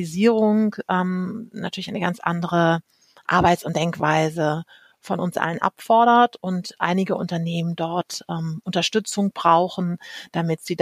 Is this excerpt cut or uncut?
uncut